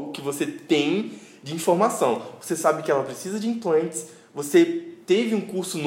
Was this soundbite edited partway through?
no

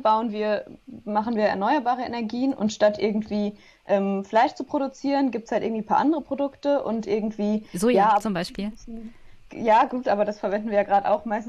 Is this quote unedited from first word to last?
yes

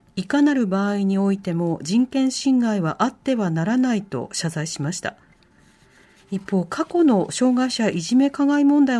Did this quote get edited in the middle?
no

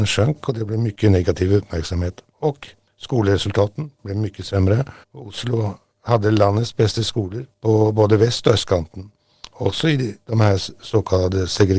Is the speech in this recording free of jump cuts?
no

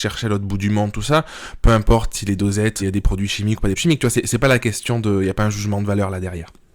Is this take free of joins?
no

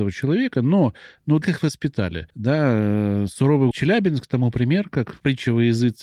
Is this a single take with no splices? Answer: no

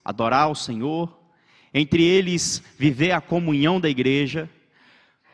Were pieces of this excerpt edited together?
no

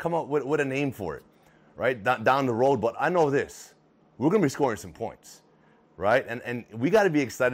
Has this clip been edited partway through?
no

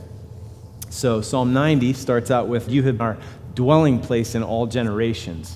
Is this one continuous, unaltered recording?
no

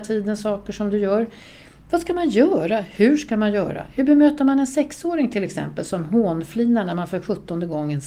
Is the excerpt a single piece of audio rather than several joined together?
yes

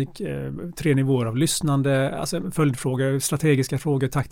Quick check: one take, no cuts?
yes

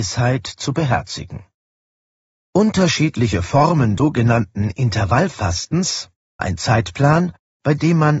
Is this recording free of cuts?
no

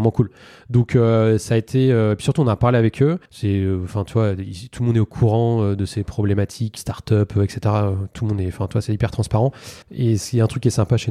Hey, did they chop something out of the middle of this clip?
yes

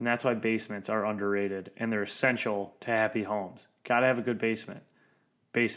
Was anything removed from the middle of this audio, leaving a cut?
no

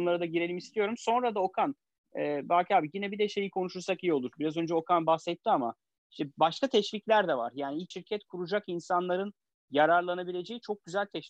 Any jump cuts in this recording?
yes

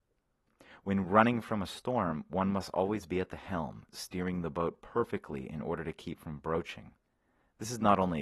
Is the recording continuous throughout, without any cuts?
yes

